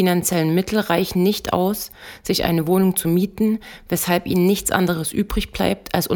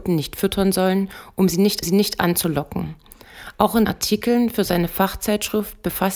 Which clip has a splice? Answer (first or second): second